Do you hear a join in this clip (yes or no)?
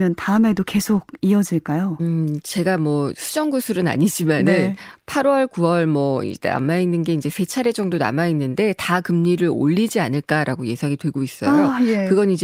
no